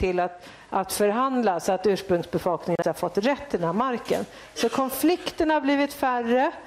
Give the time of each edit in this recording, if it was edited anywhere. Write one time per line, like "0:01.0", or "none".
0:02.8